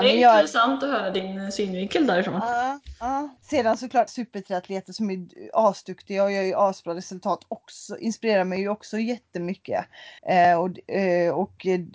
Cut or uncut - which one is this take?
cut